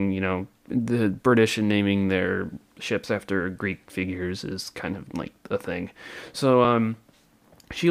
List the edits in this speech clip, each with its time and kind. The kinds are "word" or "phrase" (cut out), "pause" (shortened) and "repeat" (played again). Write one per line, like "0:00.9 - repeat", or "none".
none